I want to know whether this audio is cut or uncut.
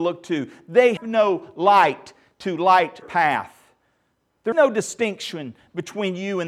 cut